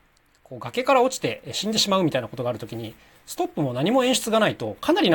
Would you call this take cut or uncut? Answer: uncut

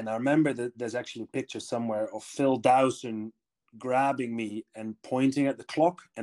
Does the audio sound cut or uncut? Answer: uncut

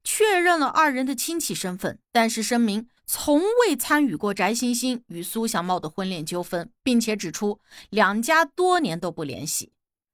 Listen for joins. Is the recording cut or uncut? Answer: cut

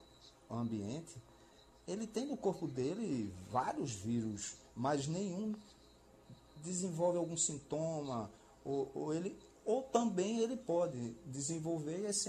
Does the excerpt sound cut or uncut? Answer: uncut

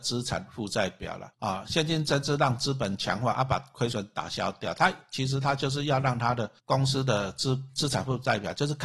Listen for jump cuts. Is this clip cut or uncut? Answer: cut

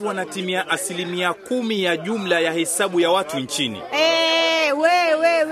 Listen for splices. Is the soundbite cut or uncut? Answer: uncut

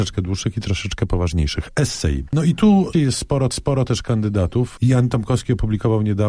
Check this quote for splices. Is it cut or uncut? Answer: cut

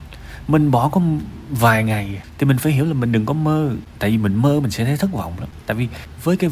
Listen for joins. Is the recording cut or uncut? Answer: uncut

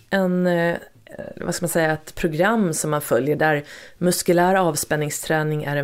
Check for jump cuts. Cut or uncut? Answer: uncut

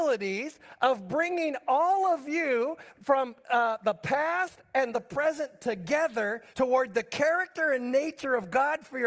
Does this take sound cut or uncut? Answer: cut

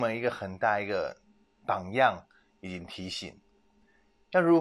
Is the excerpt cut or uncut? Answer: uncut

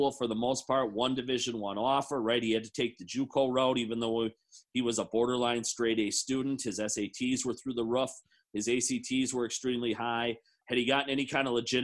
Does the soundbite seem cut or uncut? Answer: uncut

